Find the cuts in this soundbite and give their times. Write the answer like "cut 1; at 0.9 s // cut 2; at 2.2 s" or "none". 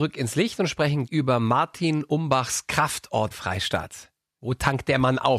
cut 1; at 1.1 s // cut 2; at 3.3 s